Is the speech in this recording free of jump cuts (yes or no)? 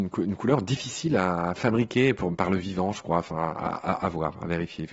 yes